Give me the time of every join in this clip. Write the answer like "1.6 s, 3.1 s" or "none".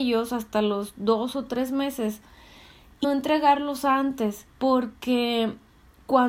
3.0 s, 4.5 s